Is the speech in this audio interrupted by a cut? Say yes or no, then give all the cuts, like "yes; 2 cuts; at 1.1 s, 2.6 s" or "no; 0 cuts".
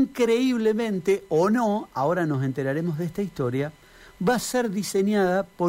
no; 0 cuts